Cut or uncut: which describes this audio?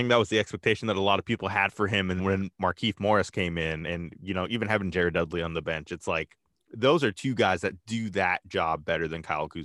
cut